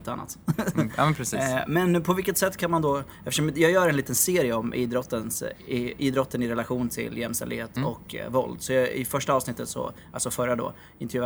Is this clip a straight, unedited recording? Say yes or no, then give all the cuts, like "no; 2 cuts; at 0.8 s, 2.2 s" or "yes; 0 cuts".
yes; 0 cuts